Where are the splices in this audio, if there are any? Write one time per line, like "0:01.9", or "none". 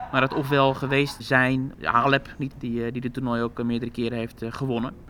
0:01.2
0:02.5